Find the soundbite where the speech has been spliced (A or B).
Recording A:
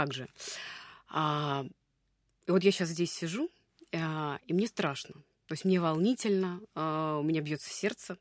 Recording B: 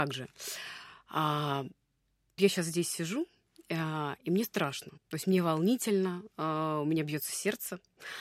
B